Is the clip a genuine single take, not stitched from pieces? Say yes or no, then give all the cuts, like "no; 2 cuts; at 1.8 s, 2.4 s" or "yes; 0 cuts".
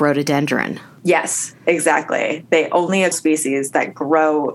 no; 1 cut; at 3.1 s